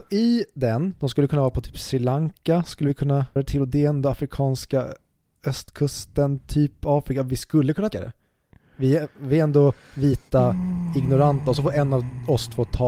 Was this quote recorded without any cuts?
no; 2 cuts; at 3.4 s, 7.9 s

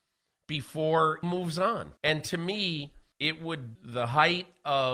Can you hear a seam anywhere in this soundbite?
yes; 4 cuts; at 1.2 s, 2.0 s, 3.1 s, 3.8 s

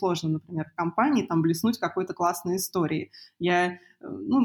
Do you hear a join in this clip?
no; 0 cuts

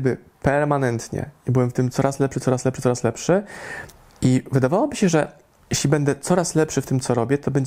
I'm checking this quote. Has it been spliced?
no; 0 cuts

